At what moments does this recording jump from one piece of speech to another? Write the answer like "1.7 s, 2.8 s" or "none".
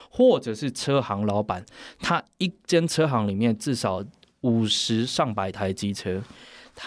none